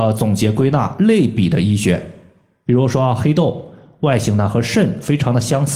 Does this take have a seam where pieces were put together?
no; 0 cuts

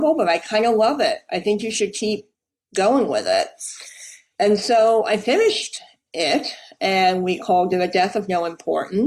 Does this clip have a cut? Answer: no; 0 cuts

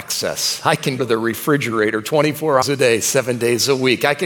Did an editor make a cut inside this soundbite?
yes; 2 cuts; at 1.0 s, 2.6 s

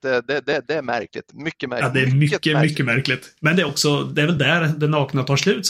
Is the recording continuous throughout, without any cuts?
yes; 0 cuts

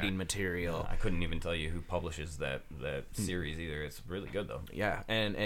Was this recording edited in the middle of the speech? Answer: no; 0 cuts

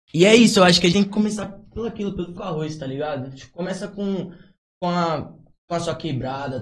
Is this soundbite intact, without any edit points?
no; 2 cuts; at 0.9 s, 2.4 s

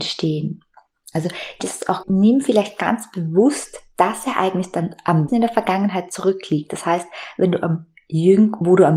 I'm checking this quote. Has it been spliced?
yes; 3 cuts; at 1.6 s, 2.0 s, 5.3 s

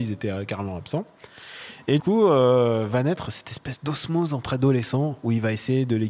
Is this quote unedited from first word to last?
no; 1 cut; at 2.0 s

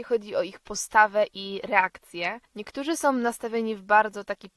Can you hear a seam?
yes; 1 cut; at 2.4 s

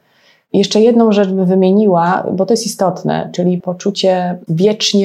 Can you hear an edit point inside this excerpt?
yes; 1 cut; at 3.6 s

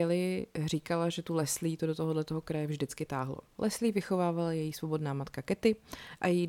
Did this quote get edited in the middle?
no; 0 cuts

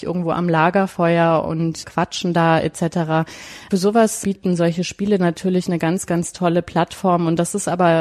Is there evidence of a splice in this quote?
no; 0 cuts

